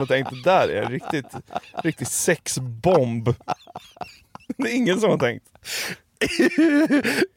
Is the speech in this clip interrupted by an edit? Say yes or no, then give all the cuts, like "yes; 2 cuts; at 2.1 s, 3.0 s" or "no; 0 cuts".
no; 0 cuts